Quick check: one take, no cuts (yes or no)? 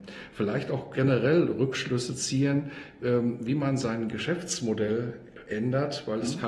yes